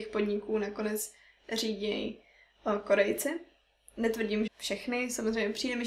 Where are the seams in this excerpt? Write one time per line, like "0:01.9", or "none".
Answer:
0:04.5